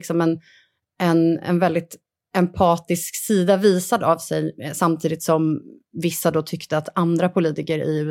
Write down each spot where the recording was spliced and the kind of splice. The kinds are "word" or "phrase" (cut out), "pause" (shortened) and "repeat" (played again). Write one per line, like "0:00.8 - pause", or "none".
none